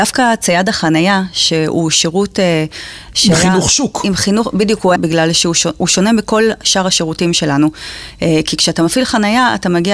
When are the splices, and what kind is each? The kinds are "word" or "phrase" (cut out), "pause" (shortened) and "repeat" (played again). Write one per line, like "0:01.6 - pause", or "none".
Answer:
0:05.0 - phrase